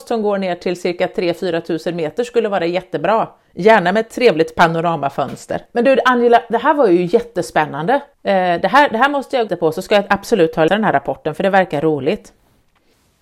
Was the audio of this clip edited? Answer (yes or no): yes